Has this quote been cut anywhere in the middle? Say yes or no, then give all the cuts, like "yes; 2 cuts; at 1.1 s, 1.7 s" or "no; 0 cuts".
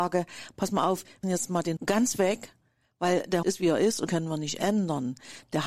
yes; 4 cuts; at 1.2 s, 1.8 s, 3.4 s, 4.1 s